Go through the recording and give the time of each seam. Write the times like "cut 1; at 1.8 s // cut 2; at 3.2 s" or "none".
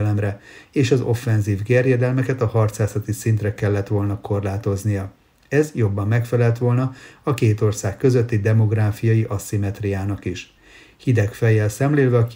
none